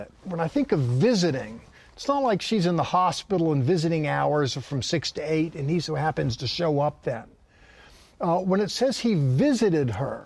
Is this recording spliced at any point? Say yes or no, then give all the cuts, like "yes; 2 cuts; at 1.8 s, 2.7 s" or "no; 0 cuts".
no; 0 cuts